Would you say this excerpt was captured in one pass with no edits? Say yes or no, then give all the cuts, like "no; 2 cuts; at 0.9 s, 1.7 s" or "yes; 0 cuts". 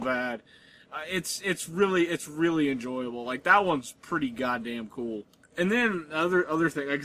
yes; 0 cuts